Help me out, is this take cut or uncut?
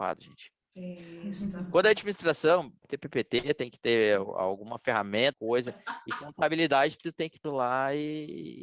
cut